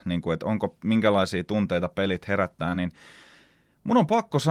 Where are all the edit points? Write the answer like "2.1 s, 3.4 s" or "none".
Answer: none